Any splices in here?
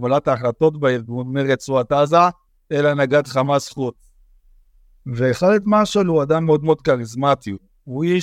yes; 1 cut; at 2.5 s

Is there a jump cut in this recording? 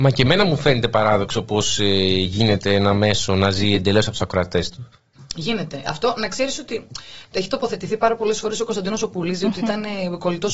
no; 0 cuts

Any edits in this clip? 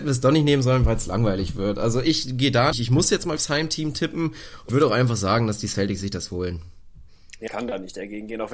yes; 4 cuts; at 2.7 s, 3.4 s, 4.7 s, 7.5 s

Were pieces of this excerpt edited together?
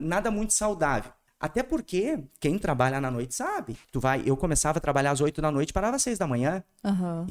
yes; 2 cuts; at 1.3 s, 3.8 s

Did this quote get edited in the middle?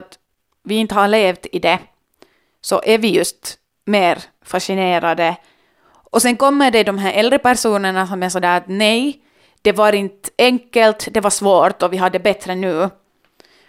no; 0 cuts

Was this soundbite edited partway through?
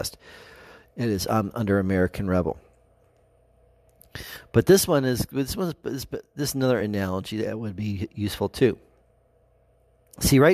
no; 0 cuts

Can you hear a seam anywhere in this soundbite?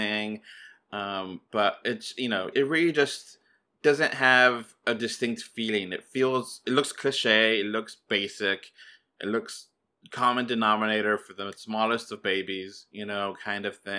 yes; 1 cut; at 2.5 s

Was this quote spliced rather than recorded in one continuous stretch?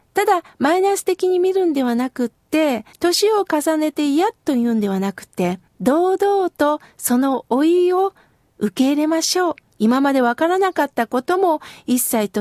yes; 3 cuts; at 2.9 s, 5.7 s, 9.7 s

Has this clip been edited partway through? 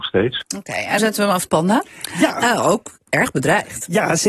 yes; 2 cuts; at 1.0 s, 1.5 s

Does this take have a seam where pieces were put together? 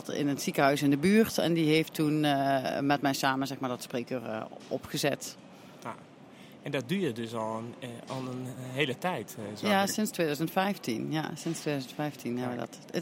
no; 0 cuts

